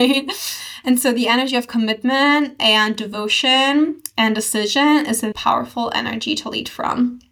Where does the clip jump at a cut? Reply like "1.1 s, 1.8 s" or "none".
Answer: 5.3 s